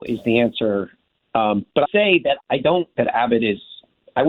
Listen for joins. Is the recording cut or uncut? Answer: cut